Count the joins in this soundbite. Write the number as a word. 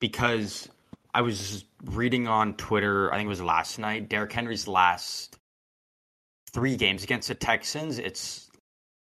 zero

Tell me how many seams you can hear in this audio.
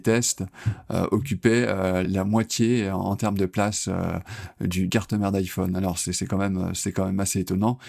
two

